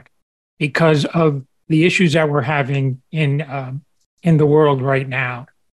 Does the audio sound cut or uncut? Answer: uncut